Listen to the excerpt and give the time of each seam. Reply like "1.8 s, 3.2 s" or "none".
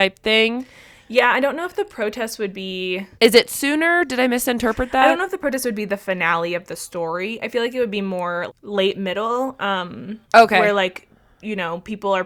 3.1 s, 8.5 s, 10.2 s